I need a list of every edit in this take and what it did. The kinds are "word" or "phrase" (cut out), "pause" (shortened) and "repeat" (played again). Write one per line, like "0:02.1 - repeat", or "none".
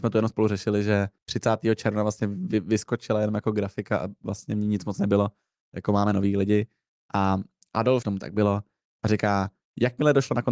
0:01.2 - pause
0:08.0 - phrase